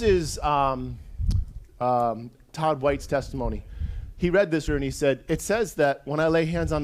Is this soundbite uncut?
no; 2 cuts; at 1.7 s, 4.7 s

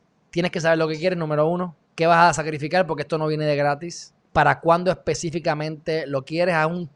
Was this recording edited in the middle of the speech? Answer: yes; 2 cuts; at 1.8 s, 4.2 s

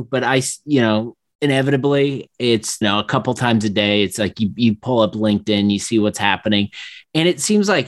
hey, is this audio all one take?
no; 1 cut; at 2.8 s

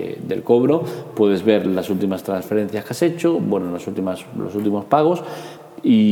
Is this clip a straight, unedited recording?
yes; 0 cuts

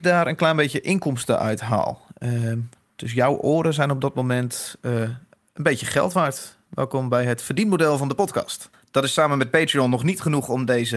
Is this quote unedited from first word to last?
yes; 0 cuts

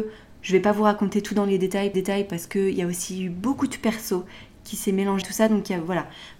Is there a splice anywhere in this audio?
yes; 2 cuts; at 1.9 s, 5.2 s

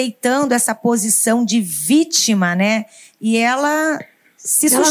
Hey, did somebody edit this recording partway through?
no; 0 cuts

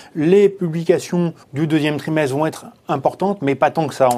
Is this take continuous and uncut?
no; 2 cuts; at 1.4 s, 2.8 s

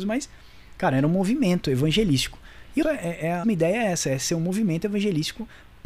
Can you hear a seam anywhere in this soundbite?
yes; 2 cuts; at 2.8 s, 3.4 s

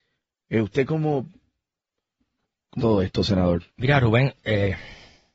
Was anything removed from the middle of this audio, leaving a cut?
yes; 2 cuts; at 2.8 s, 3.7 s

